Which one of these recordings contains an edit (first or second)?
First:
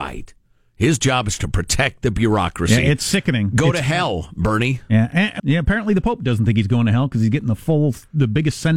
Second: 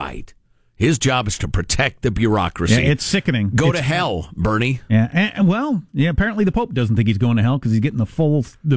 first